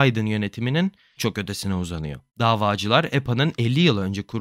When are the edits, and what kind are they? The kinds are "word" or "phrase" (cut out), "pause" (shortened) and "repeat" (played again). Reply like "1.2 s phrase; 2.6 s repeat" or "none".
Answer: 1.2 s word; 2.3 s pause